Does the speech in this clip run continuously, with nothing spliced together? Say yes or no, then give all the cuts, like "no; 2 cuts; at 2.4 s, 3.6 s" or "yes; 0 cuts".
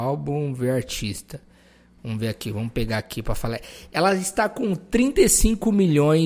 yes; 0 cuts